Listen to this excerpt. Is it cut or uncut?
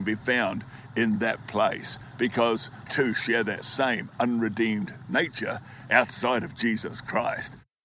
cut